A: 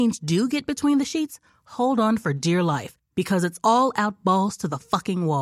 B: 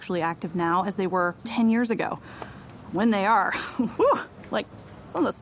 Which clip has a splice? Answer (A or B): B